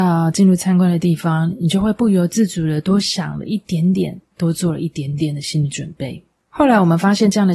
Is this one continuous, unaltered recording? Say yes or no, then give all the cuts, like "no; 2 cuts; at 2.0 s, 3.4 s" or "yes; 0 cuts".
no; 1 cut; at 6.4 s